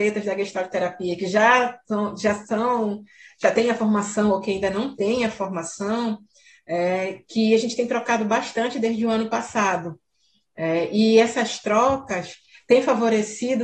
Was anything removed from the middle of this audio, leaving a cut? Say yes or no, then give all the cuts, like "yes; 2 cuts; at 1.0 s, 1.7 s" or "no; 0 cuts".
no; 0 cuts